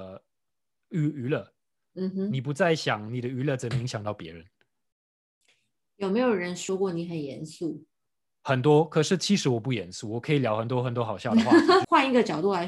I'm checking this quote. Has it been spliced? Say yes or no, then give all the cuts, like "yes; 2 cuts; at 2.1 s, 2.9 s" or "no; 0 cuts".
no; 0 cuts